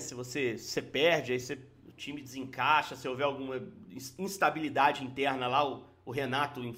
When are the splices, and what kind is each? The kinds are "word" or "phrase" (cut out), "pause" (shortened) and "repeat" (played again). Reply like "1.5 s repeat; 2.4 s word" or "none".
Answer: none